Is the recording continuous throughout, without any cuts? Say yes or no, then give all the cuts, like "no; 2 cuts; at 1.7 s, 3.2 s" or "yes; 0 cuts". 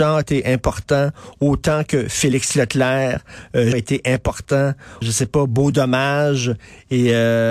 no; 2 cuts; at 3.7 s, 5.0 s